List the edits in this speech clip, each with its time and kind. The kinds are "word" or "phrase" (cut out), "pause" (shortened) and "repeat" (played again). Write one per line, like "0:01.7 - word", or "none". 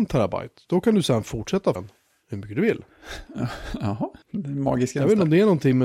0:01.7 - word
0:04.2 - pause